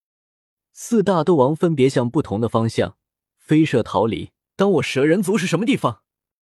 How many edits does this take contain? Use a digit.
1